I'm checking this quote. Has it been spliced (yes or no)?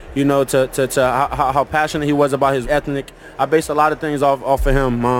yes